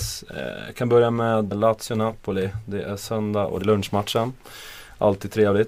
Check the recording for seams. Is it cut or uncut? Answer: cut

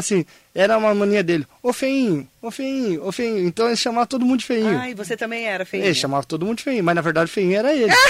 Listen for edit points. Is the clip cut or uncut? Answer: uncut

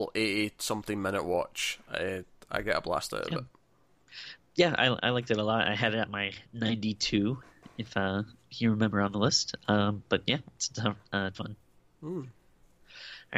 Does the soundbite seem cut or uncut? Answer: cut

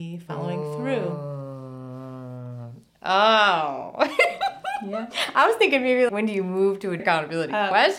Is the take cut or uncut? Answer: cut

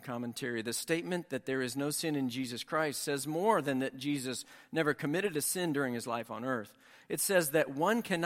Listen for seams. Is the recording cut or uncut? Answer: uncut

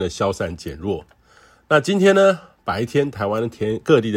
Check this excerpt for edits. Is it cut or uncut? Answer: uncut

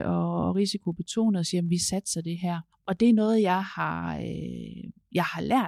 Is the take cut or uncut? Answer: cut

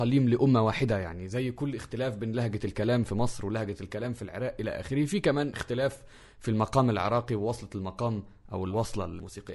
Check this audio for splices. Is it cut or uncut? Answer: uncut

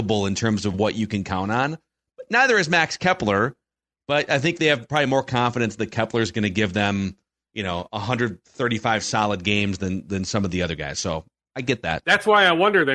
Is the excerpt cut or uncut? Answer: uncut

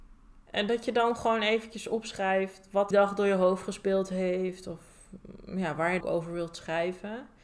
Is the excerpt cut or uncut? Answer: cut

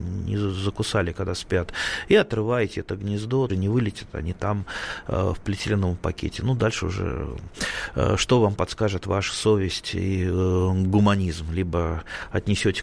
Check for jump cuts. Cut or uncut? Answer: cut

